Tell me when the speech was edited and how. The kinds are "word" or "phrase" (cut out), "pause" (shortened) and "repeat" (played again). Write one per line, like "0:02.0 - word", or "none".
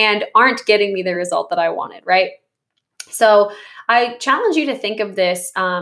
none